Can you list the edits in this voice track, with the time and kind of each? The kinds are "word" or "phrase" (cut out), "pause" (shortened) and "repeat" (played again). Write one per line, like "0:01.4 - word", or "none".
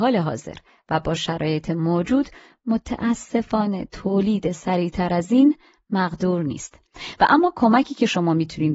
none